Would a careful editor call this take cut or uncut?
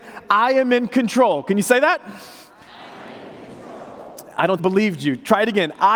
cut